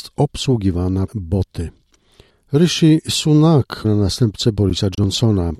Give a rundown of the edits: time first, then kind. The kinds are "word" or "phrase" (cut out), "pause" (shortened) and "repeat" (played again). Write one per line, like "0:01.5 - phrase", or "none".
0:01.1 - word
0:03.8 - phrase